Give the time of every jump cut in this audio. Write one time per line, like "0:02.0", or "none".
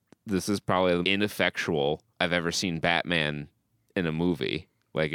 0:01.0
0:02.1
0:03.7